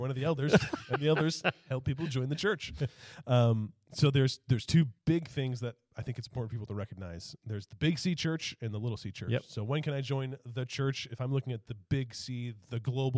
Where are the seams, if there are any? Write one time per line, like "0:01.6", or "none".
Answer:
0:05.0